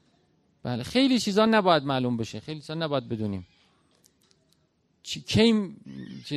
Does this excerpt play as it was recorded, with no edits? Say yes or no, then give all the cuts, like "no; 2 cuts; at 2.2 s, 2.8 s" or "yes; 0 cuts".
yes; 0 cuts